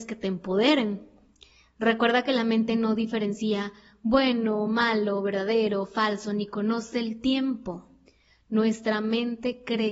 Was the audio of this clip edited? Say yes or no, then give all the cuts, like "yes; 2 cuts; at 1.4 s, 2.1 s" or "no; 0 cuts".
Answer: no; 0 cuts